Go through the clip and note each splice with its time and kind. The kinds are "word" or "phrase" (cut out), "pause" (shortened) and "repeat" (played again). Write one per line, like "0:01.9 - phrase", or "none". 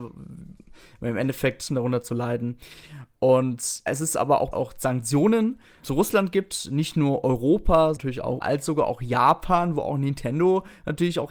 0:01.7 - phrase
0:03.9 - word
0:04.5 - phrase
0:05.8 - word
0:08.0 - word
0:08.4 - word